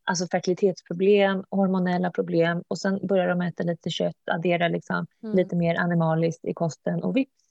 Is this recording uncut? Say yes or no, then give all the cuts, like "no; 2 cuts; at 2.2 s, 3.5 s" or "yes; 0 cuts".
no; 1 cut; at 5.1 s